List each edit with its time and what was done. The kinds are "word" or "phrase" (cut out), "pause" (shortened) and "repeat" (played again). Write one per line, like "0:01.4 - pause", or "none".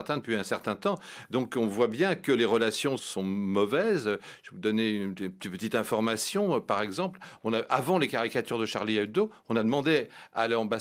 0:03.0 - word